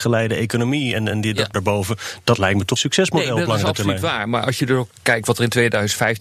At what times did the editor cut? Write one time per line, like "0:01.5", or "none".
0:01.5
0:02.8